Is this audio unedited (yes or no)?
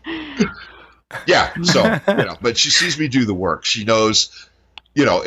no